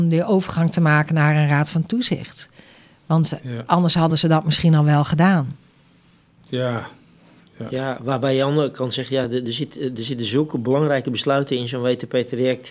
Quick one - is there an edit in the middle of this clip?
no; 0 cuts

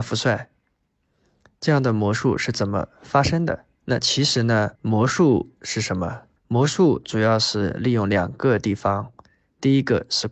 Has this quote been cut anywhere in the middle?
yes; 3 cuts; at 3.8 s, 4.8 s, 6.4 s

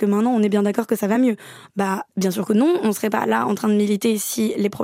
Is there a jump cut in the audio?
no; 0 cuts

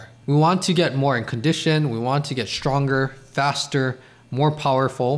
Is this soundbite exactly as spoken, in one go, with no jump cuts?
yes; 0 cuts

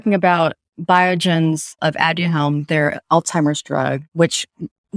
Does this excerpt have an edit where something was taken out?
yes; 1 cut; at 1.8 s

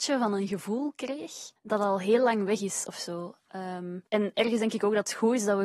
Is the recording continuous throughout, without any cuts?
no; 2 cuts; at 1.6 s, 4.1 s

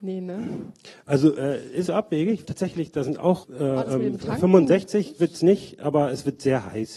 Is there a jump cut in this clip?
yes; 3 cuts; at 1.9 s, 2.4 s, 3.4 s

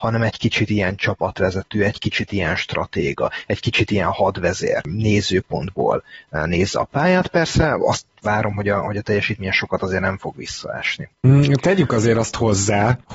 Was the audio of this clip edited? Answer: no; 0 cuts

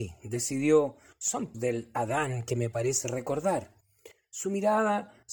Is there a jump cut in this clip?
yes; 1 cut; at 1.5 s

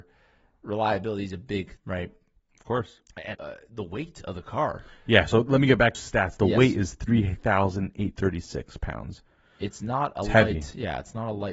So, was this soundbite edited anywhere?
yes; 3 cuts; at 1.8 s, 3.3 s, 5.9 s

